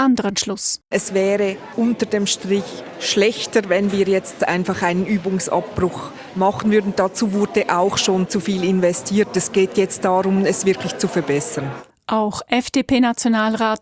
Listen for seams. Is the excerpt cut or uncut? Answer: uncut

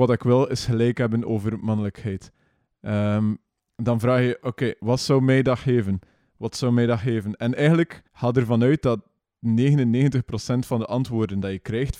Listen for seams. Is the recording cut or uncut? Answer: cut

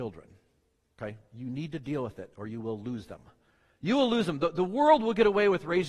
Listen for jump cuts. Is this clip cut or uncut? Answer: uncut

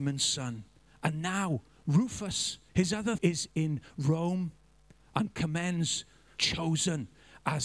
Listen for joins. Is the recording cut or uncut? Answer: cut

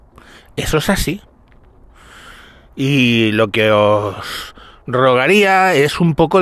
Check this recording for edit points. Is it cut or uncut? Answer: uncut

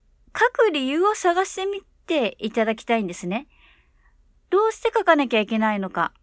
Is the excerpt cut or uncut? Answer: uncut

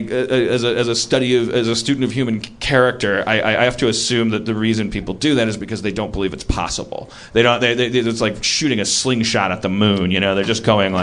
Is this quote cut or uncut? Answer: uncut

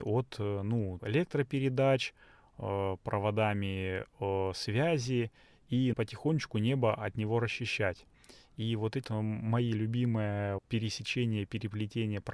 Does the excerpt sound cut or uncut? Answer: cut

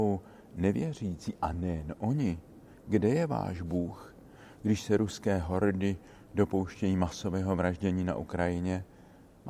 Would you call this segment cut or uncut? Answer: uncut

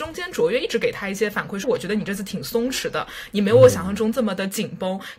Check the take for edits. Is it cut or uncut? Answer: cut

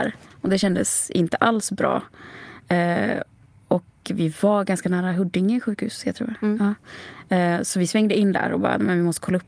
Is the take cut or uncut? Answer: uncut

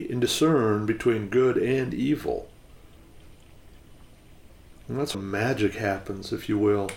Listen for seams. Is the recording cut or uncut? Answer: cut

